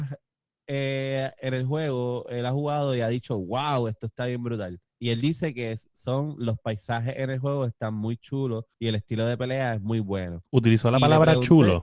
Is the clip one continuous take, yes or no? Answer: no